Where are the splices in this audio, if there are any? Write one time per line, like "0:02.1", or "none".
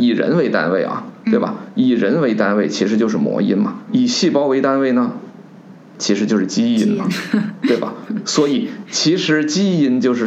0:03.9